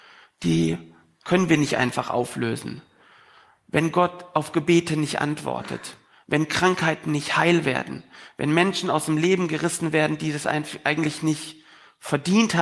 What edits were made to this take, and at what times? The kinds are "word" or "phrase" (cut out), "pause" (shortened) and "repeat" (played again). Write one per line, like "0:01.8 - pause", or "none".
none